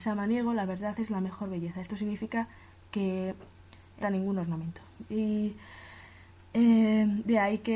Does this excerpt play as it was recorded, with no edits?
no; 1 cut; at 4.0 s

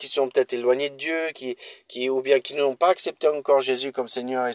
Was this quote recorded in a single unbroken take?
yes; 0 cuts

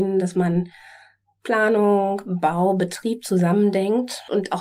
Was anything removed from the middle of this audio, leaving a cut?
no; 0 cuts

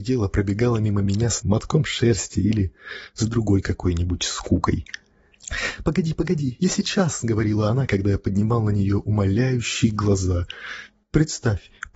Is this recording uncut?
no; 1 cut; at 1.4 s

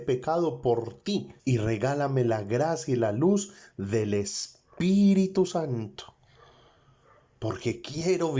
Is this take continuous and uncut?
no; 1 cut; at 1.4 s

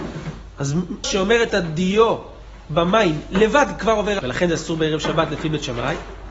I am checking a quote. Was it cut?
yes; 3 cuts; at 1.0 s, 1.5 s, 4.2 s

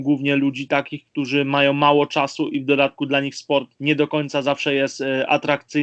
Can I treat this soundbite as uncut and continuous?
no; 1 cut; at 3.8 s

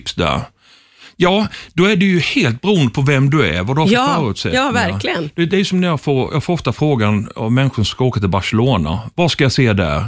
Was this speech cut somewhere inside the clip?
no; 0 cuts

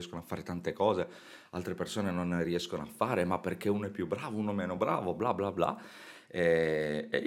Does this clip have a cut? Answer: no; 0 cuts

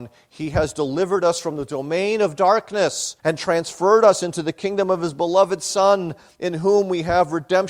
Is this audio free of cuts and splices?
no; 1 cut; at 3.2 s

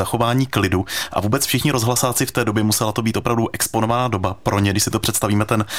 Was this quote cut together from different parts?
no; 0 cuts

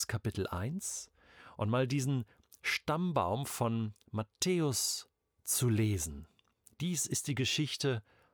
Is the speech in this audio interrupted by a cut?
no; 0 cuts

